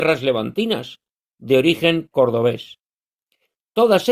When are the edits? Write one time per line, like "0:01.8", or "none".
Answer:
0:01.3